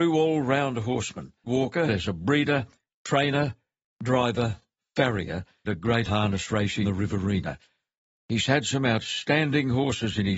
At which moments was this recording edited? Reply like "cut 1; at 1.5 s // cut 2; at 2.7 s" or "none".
cut 1; at 1.5 s // cut 2; at 1.9 s // cut 3; at 2.9 s // cut 4; at 5.6 s // cut 5; at 6.1 s // cut 6; at 6.8 s